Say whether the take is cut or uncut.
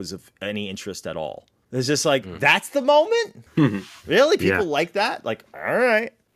cut